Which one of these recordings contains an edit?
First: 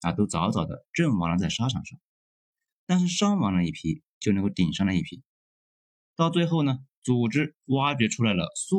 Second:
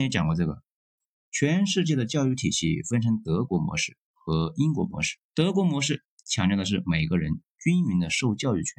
second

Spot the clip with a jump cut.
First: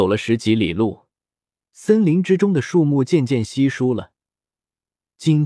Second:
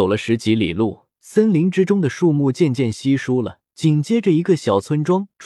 second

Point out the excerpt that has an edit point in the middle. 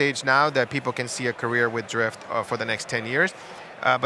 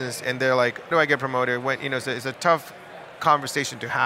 second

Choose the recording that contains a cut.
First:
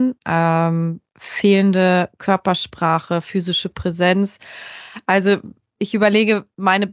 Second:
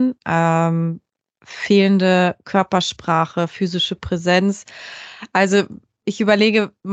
first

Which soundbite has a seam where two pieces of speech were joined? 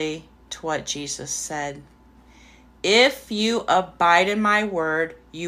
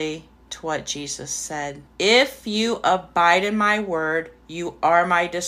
second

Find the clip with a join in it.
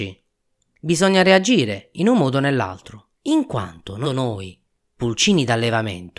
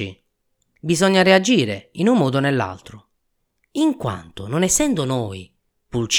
first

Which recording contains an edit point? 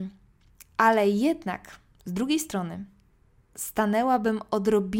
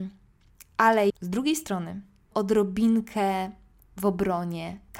second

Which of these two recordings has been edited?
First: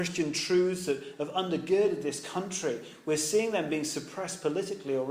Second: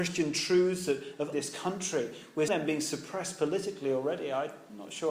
second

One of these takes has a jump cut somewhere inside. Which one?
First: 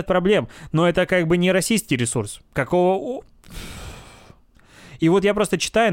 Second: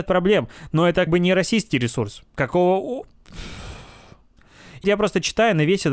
second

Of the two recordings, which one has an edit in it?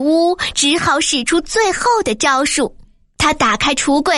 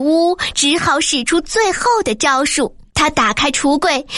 second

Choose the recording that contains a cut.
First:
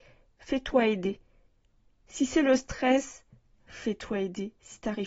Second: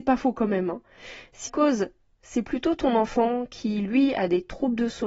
second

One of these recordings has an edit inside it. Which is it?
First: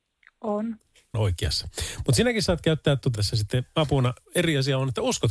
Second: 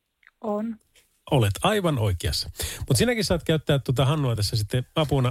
first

